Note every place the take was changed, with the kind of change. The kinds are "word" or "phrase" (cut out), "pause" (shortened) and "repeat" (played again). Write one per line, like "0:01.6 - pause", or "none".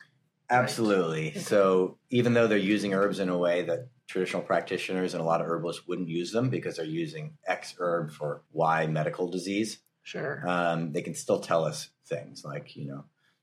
0:02.0 - pause
0:04.0 - pause
0:08.5 - pause